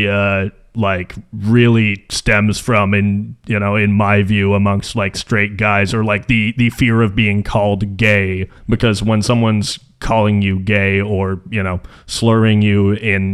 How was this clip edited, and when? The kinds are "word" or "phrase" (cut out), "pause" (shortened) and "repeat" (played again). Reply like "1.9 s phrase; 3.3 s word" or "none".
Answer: 8.6 s pause